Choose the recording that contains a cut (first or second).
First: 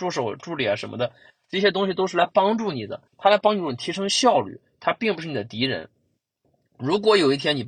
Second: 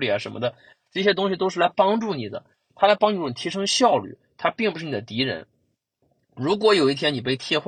first